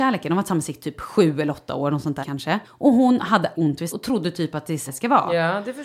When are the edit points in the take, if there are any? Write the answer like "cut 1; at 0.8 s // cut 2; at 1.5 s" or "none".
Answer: cut 1; at 2.2 s // cut 2; at 2.6 s // cut 3; at 3.5 s // cut 4; at 3.9 s // cut 5; at 4.9 s